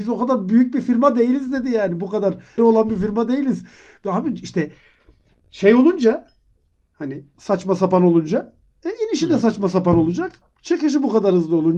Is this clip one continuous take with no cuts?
no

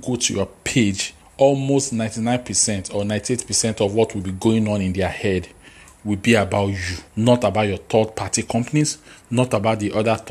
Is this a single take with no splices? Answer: no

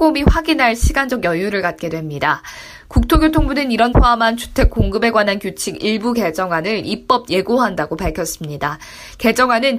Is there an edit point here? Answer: yes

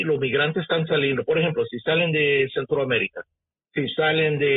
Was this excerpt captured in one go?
yes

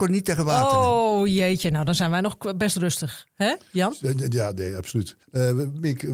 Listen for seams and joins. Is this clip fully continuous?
no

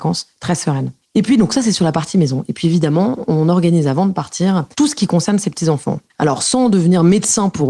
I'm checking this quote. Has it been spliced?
yes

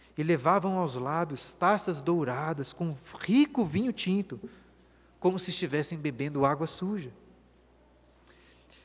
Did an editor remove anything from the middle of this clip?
no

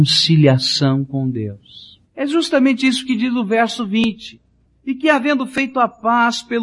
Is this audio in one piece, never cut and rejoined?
no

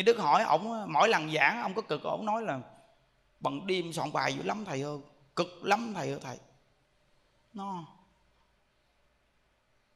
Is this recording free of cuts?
yes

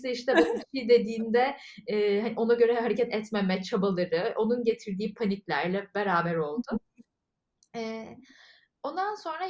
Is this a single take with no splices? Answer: yes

